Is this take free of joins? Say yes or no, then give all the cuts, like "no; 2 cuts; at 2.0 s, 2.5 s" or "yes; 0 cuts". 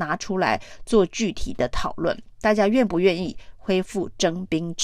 yes; 0 cuts